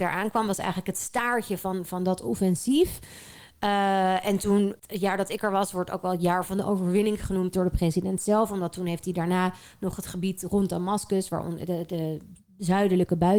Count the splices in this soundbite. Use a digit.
1